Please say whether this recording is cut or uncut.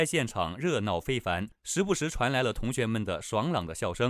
cut